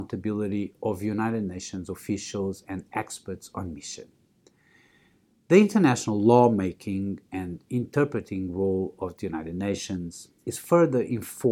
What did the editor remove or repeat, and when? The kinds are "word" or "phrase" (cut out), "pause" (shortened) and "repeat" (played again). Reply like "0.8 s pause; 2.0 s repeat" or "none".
none